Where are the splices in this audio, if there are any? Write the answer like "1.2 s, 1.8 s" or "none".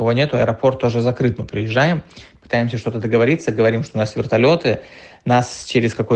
none